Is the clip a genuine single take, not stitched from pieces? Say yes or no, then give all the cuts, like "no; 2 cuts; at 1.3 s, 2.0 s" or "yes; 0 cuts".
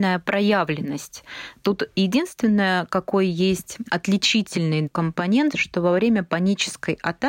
yes; 0 cuts